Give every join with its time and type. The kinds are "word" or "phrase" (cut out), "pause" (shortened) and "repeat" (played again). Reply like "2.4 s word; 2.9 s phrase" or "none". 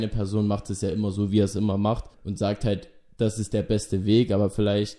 2.1 s pause